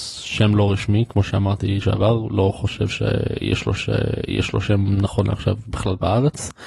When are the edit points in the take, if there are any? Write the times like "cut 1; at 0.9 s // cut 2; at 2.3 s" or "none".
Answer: cut 1; at 1.8 s // cut 2; at 3.8 s